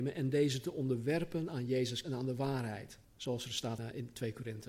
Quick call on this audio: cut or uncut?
cut